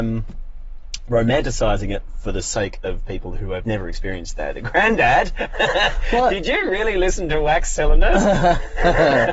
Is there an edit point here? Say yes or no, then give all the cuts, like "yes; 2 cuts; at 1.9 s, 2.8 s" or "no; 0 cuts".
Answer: yes; 1 cut; at 3.6 s